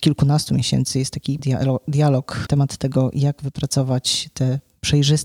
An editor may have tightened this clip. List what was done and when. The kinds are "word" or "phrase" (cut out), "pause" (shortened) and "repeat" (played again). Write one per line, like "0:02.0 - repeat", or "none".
0:01.4 - word
0:02.5 - word